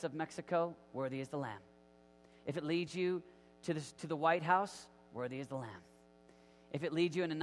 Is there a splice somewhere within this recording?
no; 0 cuts

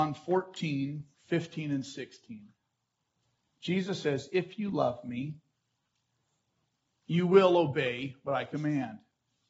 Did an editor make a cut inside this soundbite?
yes; 1 cut; at 1.1 s

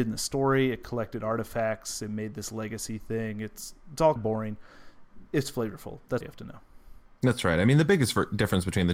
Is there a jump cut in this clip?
yes; 2 cuts; at 4.2 s, 6.2 s

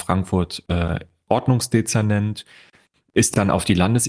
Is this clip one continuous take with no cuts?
yes; 0 cuts

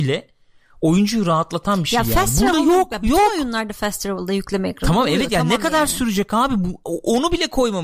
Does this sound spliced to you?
no; 0 cuts

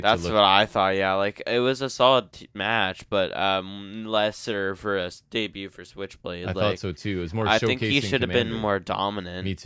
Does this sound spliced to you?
no; 0 cuts

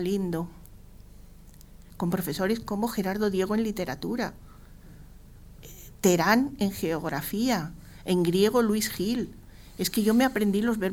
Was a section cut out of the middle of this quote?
no; 0 cuts

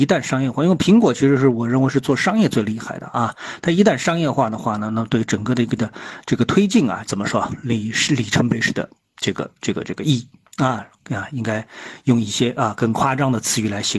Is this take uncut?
no; 2 cuts; at 5.8 s, 7.1 s

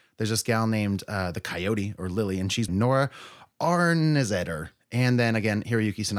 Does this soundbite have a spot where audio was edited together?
yes; 1 cut; at 2.7 s

